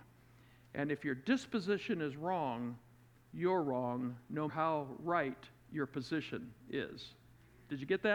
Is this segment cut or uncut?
cut